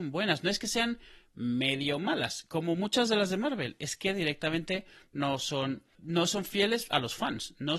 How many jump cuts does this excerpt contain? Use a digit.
1